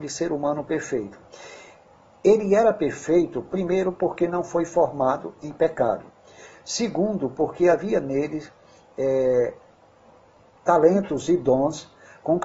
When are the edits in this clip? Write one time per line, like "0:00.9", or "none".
none